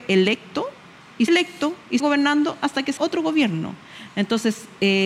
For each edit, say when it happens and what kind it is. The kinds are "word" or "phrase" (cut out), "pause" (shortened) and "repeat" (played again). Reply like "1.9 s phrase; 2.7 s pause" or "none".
1.3 s word; 2.0 s word; 3.0 s word

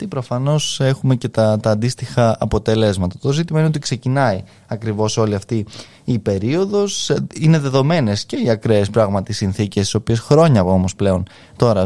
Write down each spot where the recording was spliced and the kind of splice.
none

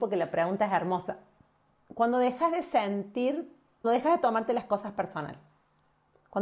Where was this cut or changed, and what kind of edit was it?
3.8 s word

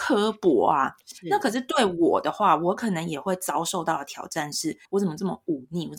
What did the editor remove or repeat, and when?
4.8 s pause

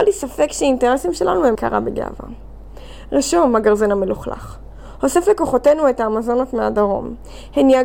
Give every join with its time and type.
1.5 s word

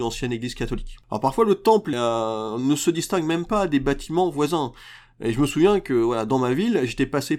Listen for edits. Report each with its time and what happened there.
1.0 s pause; 1.9 s word

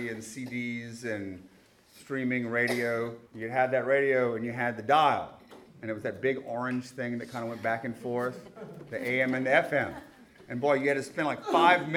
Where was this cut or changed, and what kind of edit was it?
3.3 s pause

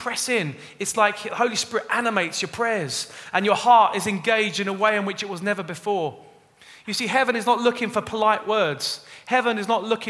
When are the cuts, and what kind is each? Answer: none

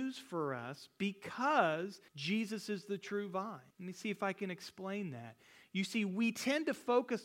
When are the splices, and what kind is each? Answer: 2.1 s pause; 3.7 s pause

